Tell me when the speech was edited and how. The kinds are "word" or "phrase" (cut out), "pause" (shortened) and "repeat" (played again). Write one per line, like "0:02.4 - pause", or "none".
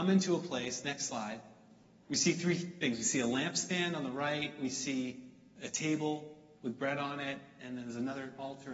none